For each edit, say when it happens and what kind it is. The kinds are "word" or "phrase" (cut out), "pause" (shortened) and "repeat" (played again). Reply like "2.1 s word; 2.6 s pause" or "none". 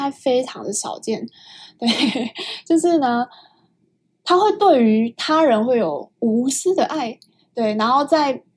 none